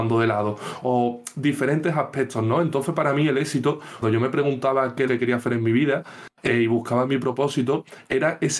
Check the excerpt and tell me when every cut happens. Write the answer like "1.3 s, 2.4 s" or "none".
4.0 s, 5.1 s